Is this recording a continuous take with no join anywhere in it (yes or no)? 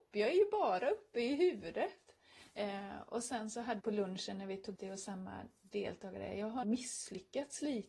no